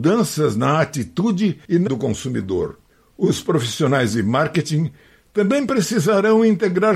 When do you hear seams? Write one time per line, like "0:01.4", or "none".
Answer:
0:01.9
0:02.9